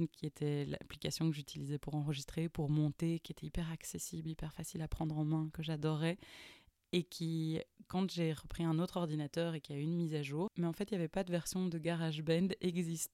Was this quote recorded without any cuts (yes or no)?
yes